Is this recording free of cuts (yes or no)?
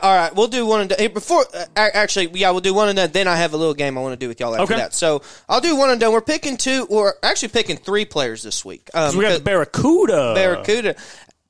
yes